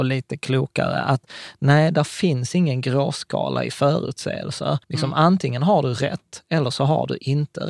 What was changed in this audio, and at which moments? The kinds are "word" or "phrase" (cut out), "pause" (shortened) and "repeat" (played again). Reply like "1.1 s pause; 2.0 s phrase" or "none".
4.8 s pause